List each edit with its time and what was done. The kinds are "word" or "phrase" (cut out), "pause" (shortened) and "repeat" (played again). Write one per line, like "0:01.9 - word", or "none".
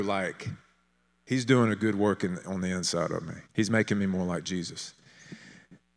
0:03.4 - pause